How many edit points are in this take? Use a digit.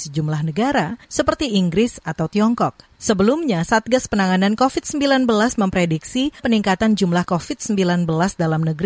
4